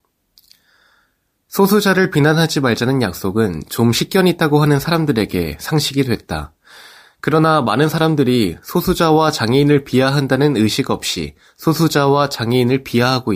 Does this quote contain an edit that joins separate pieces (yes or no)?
no